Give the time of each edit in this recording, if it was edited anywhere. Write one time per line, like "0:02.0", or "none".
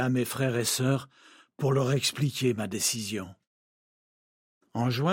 none